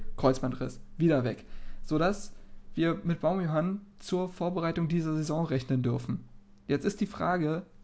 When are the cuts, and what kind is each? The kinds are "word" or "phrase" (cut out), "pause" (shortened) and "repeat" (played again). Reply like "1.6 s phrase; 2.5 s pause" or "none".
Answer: 6.6 s pause